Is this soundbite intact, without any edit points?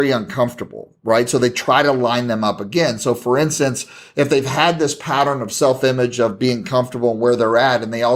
yes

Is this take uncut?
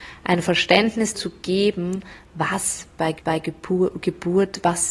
no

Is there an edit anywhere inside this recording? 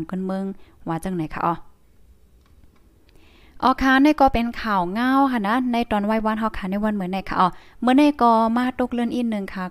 no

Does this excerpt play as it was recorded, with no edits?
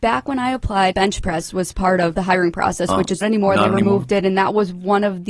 no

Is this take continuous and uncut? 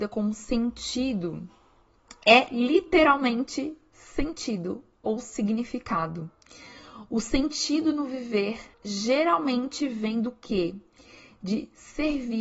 no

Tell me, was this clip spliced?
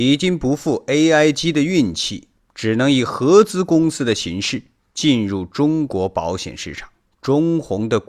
no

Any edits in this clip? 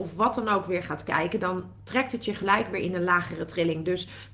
no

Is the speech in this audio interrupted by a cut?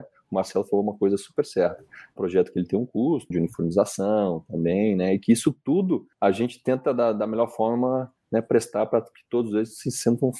yes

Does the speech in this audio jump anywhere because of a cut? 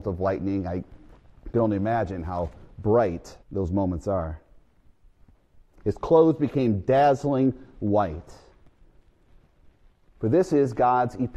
yes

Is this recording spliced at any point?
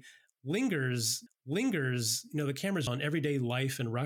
yes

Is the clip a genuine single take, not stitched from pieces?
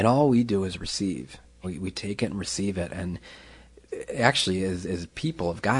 no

